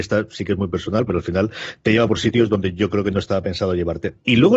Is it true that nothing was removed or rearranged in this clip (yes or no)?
yes